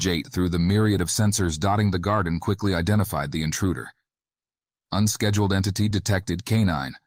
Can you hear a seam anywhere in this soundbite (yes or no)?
no